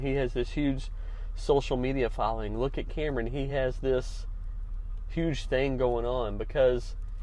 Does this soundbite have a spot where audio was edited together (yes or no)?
no